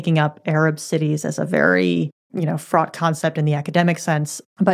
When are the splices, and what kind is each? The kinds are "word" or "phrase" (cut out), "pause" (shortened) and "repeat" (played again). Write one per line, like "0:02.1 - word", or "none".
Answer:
none